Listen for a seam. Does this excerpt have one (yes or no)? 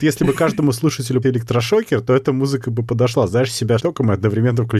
yes